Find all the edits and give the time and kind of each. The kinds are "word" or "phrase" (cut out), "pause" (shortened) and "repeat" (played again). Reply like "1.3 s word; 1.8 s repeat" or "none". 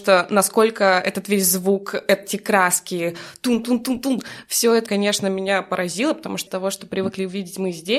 4.9 s word; 6.5 s phrase